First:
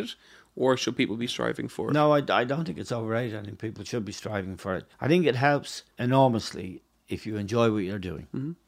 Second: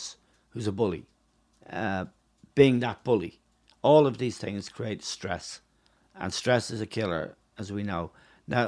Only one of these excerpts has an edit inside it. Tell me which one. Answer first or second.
first